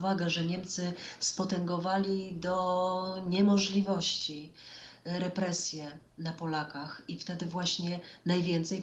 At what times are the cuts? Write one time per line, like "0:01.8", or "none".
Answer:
none